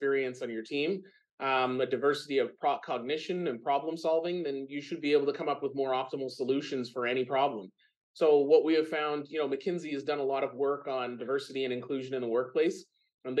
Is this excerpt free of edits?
yes; 0 cuts

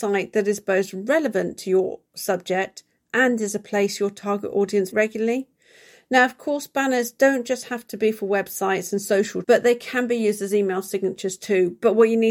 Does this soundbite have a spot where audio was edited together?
yes; 2 cuts; at 4.9 s, 9.4 s

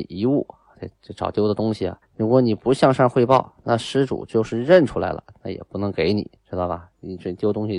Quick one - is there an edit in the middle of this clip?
yes; 2 cuts; at 2.0 s, 6.4 s

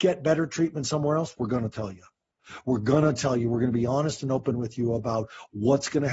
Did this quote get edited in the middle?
no; 0 cuts

